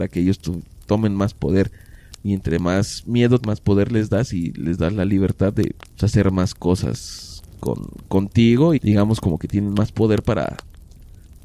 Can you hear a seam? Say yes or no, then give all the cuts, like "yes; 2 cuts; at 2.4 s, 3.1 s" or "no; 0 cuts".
yes; 3 cuts; at 3.4 s, 5.8 s, 8.8 s